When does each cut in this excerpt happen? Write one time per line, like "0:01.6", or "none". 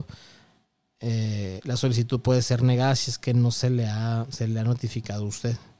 none